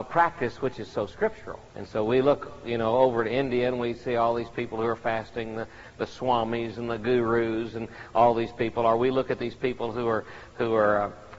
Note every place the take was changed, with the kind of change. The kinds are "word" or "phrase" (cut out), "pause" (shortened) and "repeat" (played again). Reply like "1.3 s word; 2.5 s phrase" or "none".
1.7 s pause